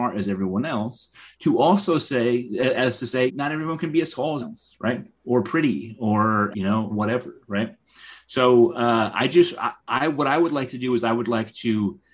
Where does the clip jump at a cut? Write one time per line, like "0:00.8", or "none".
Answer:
0:03.3
0:04.4
0:06.5
0:06.9